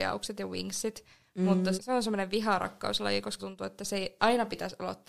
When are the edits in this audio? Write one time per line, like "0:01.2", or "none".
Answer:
0:01.8
0:03.4
0:04.2